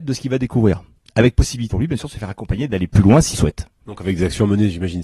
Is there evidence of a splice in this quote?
yes; 2 cuts; at 1.7 s, 3.3 s

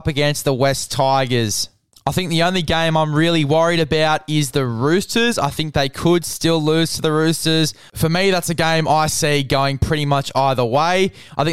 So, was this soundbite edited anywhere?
no; 0 cuts

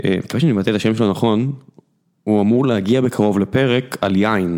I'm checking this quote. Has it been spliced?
no; 0 cuts

